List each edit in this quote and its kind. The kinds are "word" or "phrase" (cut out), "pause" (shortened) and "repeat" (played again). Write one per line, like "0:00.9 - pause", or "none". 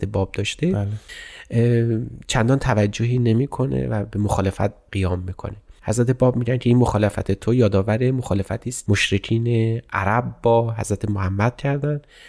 0:08.9 - word